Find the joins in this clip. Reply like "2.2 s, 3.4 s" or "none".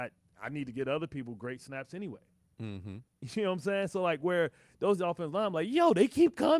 none